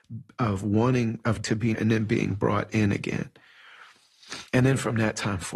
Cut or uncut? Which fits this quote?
cut